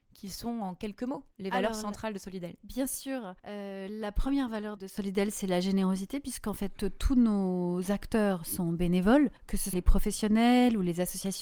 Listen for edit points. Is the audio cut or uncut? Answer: cut